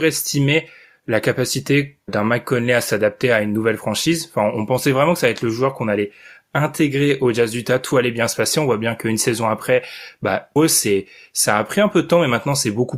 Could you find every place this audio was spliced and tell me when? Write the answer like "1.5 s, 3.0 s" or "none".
2.1 s, 10.6 s

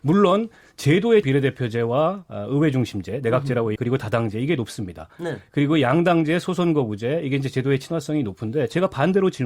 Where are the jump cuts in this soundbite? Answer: 1.2 s, 3.8 s

